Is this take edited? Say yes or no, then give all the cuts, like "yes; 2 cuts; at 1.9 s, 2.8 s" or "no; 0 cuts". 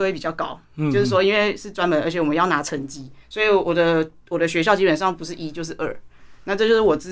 yes; 1 cut; at 3.2 s